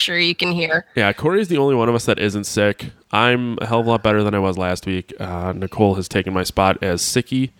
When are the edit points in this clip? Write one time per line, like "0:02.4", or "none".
none